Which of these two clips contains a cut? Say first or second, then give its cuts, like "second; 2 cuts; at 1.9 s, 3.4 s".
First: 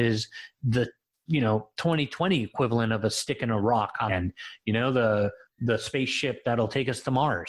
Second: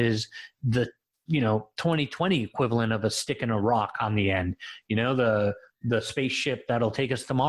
first; 1 cut; at 4.1 s